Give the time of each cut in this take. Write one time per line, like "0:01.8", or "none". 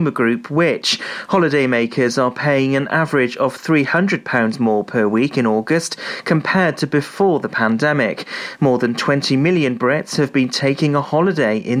none